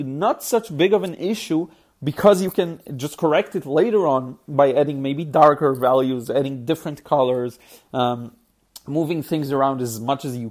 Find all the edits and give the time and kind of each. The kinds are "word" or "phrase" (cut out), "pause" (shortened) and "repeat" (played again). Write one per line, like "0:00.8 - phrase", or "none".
none